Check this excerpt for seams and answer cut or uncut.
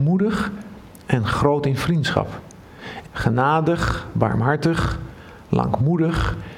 cut